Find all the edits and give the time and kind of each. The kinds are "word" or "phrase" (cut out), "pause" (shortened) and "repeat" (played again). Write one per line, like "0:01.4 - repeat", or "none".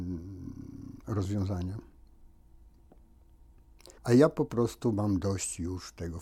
0:04.0 - pause